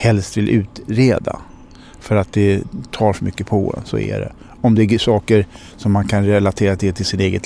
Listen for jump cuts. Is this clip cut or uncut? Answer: uncut